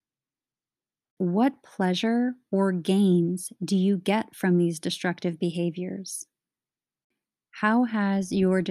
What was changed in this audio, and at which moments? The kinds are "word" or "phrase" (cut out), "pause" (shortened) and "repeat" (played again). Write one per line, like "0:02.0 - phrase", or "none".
none